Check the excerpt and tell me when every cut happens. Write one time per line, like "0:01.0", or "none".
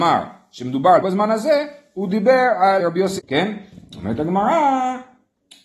0:01.0
0:02.8
0:03.2